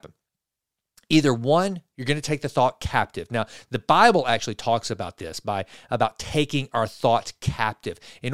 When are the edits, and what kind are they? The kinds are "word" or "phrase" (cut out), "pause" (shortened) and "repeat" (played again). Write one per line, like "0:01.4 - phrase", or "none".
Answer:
none